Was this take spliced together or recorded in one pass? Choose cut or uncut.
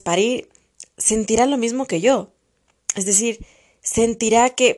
uncut